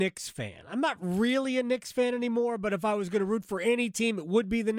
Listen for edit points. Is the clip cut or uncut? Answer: uncut